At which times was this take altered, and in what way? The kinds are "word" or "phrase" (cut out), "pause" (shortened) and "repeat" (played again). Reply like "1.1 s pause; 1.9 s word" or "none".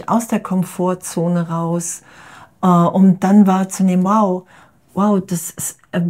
none